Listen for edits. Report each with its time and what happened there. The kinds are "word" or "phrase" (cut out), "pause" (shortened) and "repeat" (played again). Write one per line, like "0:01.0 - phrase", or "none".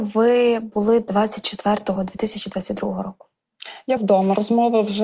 0:02.0 - word
0:04.0 - word

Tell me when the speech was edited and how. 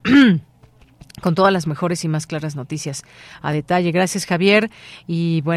none

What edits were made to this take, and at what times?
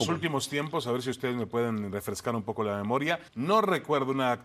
0:03.3 - pause

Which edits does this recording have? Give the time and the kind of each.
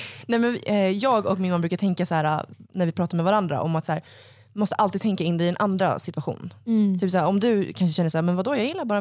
none

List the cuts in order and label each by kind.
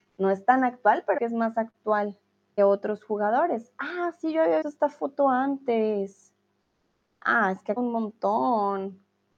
0:01.2 - word
0:02.6 - word
0:04.6 - word
0:07.8 - word

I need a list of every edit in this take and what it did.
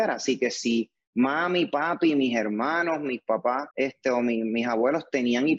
0:03.7 - pause

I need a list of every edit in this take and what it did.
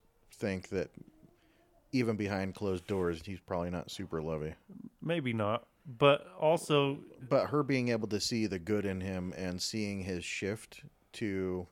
none

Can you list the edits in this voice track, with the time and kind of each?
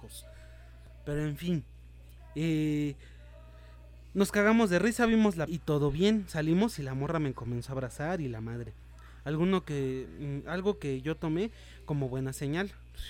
0:05.5 - word

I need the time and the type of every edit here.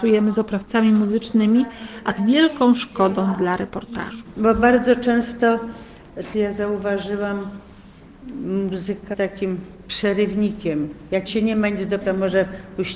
0:02.2 - word
0:06.3 - word
0:09.1 - word
0:11.3 - word
0:12.0 - word

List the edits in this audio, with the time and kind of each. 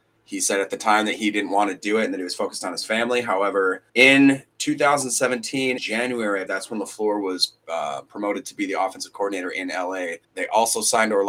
0:03.9 - pause
0:05.8 - word
0:06.5 - word
0:10.2 - pause

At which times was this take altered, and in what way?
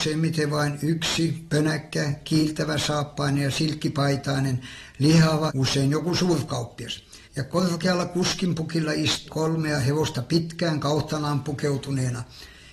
0:05.5 - phrase
0:07.2 - pause
0:09.3 - word

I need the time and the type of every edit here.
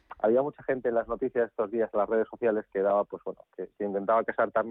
none

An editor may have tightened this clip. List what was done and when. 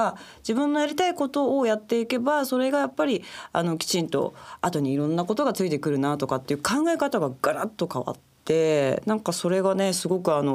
0:08.4 - pause

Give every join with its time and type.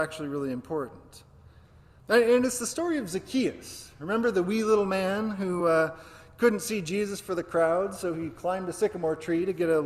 none

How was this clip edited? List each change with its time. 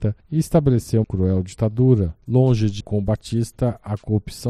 0:01.0 - word
0:02.2 - pause
0:02.8 - word

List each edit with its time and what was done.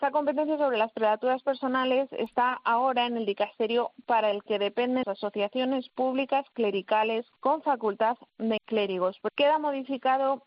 0:04.5 - phrase
0:05.0 - word
0:07.3 - pause
0:08.6 - word
0:09.3 - word

